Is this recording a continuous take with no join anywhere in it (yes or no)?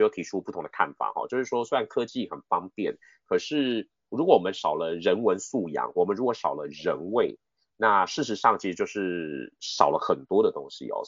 yes